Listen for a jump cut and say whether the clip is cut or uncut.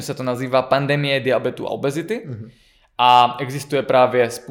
uncut